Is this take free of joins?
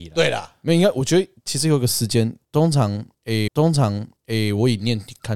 no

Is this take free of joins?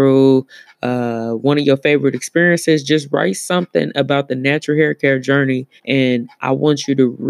no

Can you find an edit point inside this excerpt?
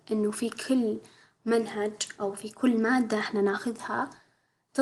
no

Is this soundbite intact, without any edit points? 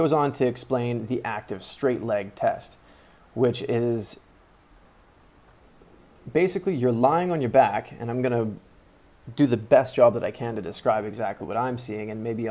yes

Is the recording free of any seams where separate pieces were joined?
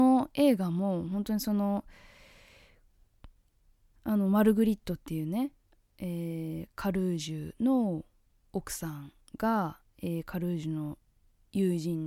yes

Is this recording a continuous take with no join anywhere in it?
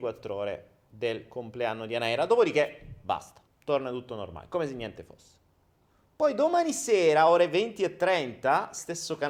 no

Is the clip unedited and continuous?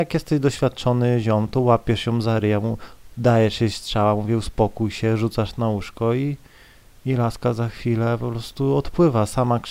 yes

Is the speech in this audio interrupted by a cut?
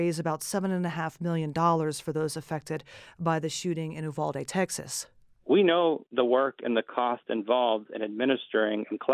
no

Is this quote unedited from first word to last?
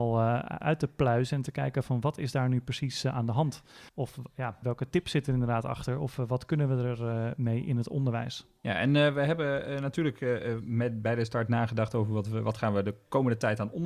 no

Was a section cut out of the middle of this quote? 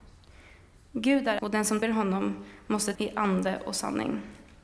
yes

